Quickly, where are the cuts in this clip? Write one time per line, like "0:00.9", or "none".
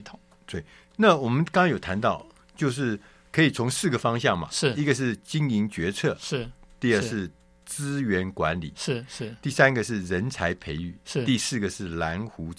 none